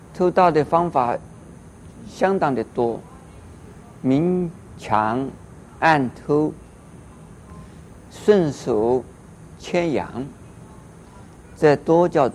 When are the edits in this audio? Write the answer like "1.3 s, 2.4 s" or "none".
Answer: 8.1 s